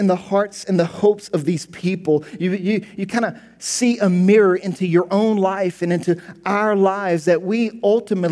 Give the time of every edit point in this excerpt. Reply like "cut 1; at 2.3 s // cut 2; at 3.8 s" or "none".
none